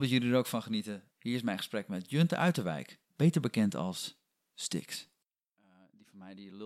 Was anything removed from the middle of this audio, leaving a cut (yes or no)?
yes